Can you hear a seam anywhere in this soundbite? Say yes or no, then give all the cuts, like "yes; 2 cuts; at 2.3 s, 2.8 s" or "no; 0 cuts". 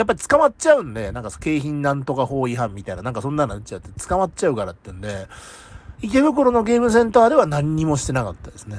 yes; 1 cut; at 5.9 s